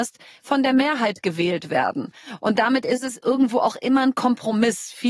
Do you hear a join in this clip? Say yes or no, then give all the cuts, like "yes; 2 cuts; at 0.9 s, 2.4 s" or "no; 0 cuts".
no; 0 cuts